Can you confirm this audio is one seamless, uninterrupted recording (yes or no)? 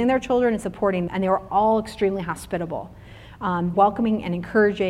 no